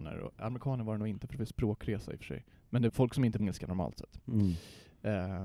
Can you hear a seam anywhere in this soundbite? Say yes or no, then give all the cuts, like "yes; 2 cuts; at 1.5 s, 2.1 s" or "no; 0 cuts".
yes; 3 cuts; at 2.5 s, 2.9 s, 3.4 s